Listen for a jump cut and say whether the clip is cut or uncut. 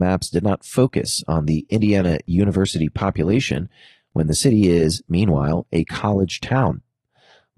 uncut